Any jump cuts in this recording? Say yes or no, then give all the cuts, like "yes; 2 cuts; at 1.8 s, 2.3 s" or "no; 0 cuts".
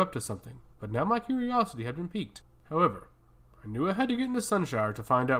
no; 0 cuts